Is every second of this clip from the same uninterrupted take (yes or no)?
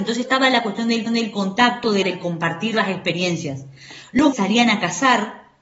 no